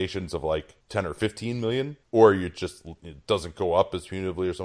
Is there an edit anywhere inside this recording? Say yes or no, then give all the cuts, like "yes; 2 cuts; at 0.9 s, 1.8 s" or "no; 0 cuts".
no; 0 cuts